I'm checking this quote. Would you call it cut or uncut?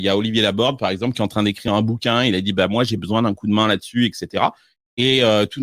uncut